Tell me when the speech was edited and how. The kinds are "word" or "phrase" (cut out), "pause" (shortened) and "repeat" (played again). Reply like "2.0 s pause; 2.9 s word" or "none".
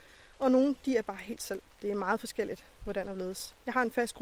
1.7 s pause